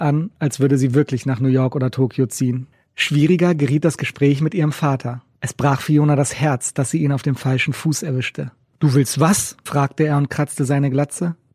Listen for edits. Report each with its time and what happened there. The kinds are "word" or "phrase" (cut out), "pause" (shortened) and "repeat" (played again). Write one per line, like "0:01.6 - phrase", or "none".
none